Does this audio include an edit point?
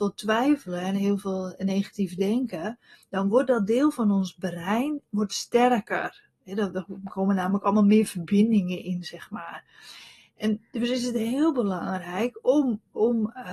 no; 0 cuts

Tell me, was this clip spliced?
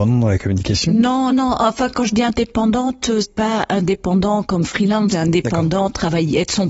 yes; 3 cuts; at 1.3 s, 3.2 s, 5.1 s

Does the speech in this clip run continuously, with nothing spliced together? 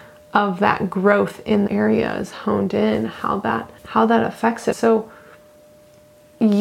no; 3 cuts; at 1.7 s, 3.8 s, 4.7 s

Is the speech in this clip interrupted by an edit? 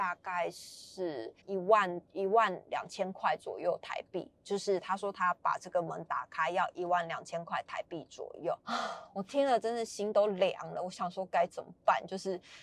yes; 3 cuts; at 1.4 s, 2.1 s, 8.6 s

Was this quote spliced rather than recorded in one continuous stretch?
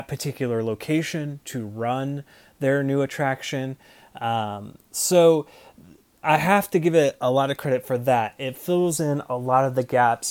no; 0 cuts

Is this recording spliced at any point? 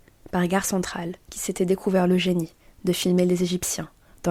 yes; 1 cut; at 1.2 s

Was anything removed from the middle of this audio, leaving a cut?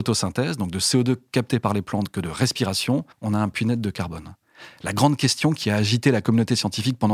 yes; 1 cut; at 3.1 s

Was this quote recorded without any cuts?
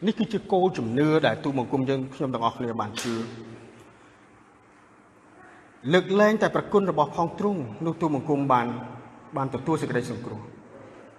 yes; 0 cuts

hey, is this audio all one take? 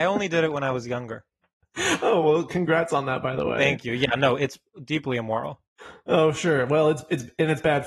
yes; 0 cuts

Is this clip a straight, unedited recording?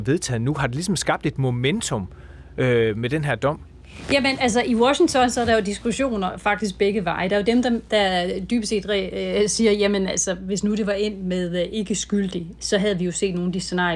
yes; 0 cuts

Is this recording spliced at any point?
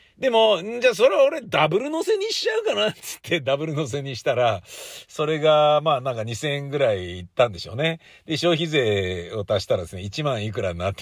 no; 0 cuts

